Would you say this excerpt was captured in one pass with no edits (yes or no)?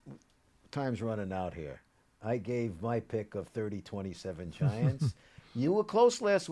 yes